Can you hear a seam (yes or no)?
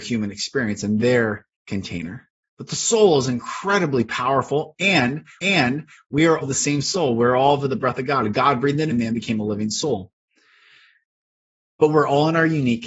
yes